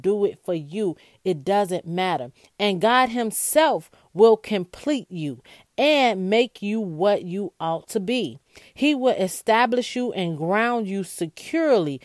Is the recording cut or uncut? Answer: uncut